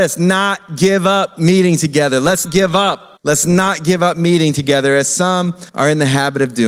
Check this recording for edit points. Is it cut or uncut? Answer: cut